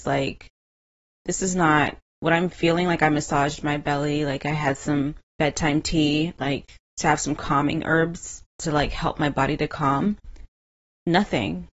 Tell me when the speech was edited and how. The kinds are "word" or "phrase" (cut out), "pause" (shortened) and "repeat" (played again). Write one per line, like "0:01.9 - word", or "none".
0:05.2 - pause